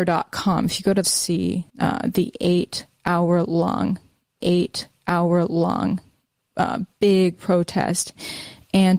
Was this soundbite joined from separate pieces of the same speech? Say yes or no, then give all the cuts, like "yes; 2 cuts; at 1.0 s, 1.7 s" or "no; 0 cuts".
yes; 3 cuts; at 1.0 s, 1.7 s, 4.4 s